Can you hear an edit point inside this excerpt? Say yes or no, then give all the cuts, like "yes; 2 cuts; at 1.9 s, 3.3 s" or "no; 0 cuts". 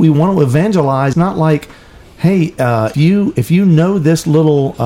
yes; 2 cuts; at 1.1 s, 2.9 s